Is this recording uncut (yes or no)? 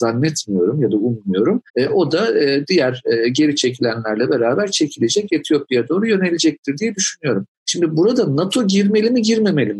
no